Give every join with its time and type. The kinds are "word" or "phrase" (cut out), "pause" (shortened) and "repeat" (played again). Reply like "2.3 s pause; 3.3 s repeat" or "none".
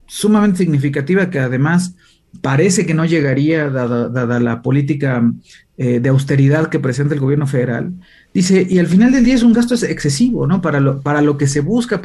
none